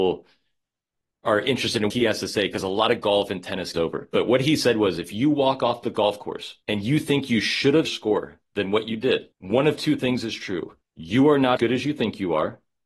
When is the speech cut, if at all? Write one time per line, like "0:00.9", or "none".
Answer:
0:01.9
0:03.7
0:06.6
0:07.8
0:09.3
0:10.8
0:11.6